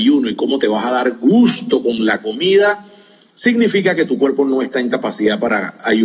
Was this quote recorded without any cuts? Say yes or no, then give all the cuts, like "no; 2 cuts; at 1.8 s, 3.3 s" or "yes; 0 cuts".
yes; 0 cuts